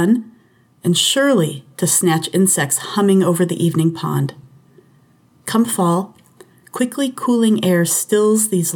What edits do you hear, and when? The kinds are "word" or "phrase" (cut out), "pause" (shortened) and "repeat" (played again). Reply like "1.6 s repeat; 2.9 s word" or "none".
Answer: none